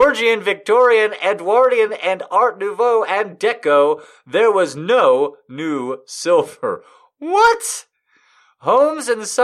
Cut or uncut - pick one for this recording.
uncut